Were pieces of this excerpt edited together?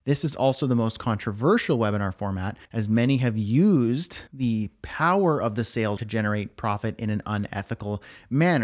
yes; 3 cuts; at 2.7 s, 4.3 s, 6.0 s

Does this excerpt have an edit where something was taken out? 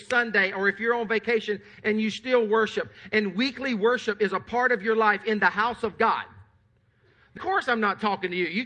yes; 1 cut; at 7.4 s

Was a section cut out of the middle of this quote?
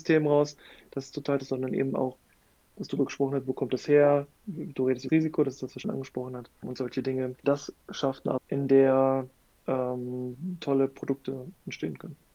yes; 6 cuts; at 1.4 s, 5.1 s, 5.8 s, 6.6 s, 7.4 s, 8.4 s

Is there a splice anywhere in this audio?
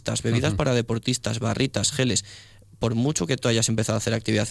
no; 0 cuts

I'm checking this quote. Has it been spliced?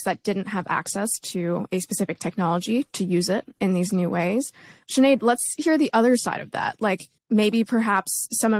no; 0 cuts

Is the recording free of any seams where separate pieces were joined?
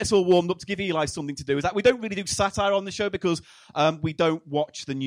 yes; 0 cuts

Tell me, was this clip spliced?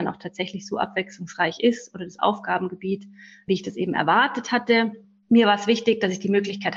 no; 0 cuts

